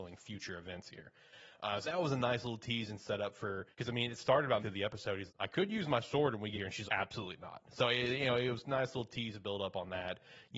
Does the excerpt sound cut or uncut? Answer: cut